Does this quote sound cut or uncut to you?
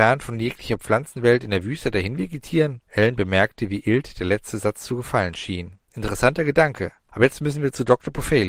cut